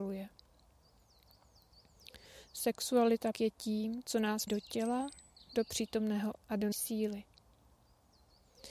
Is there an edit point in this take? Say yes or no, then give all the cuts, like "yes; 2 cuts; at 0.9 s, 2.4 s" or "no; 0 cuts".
yes; 4 cuts; at 3.3 s, 4.5 s, 6.3 s, 6.7 s